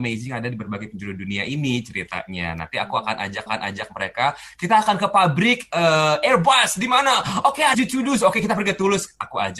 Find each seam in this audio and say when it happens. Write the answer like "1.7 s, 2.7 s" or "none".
3.5 s, 7.7 s